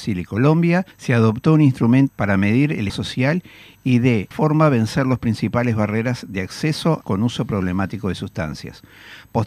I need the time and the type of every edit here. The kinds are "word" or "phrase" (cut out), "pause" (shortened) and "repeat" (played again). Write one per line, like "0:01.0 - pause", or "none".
0:00.9 - pause
0:02.1 - word
0:02.9 - word
0:04.3 - word
0:07.0 - phrase